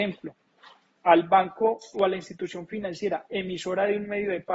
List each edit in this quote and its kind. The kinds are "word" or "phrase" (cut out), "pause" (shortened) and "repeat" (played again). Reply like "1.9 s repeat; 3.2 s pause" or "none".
1.9 s word